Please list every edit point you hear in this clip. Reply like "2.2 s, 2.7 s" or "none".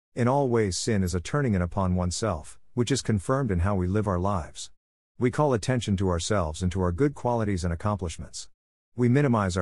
none